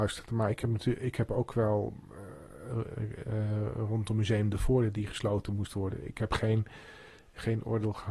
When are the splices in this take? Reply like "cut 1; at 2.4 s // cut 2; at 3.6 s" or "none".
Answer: none